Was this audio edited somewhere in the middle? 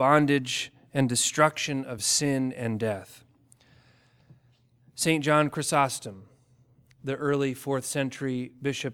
no; 0 cuts

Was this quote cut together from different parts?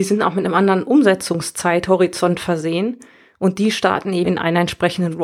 yes; 1 cut; at 4.2 s

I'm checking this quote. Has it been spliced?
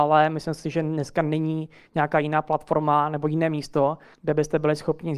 no; 0 cuts

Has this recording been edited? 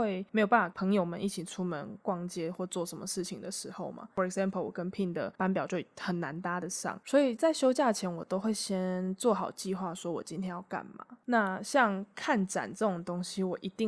no; 0 cuts

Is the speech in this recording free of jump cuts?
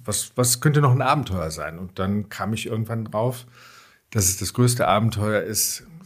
yes; 0 cuts

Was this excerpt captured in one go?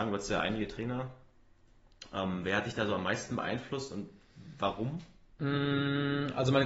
yes; 0 cuts

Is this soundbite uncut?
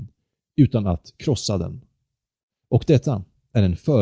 yes; 0 cuts

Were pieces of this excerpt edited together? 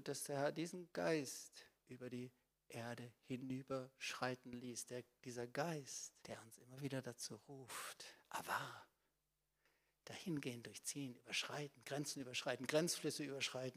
yes; 1 cut; at 6.2 s

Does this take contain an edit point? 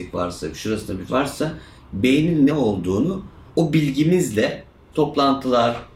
yes; 4 cuts; at 1.1 s, 2.5 s, 3.5 s, 4.9 s

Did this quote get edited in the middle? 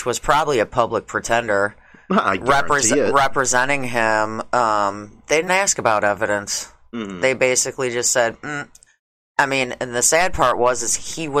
yes; 1 cut; at 5.5 s

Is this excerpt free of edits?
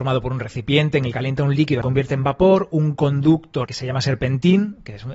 no; 3 cuts; at 1.1 s, 1.8 s, 3.7 s

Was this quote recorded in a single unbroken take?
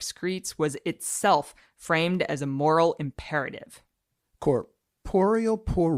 yes; 0 cuts

